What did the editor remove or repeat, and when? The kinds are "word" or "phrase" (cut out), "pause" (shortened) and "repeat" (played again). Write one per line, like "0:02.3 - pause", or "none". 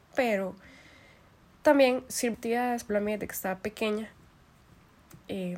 0:02.3 - word
0:02.9 - word